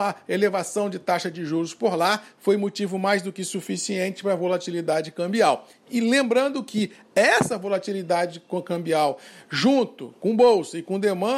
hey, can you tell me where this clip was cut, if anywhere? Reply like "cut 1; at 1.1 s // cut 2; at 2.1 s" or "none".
none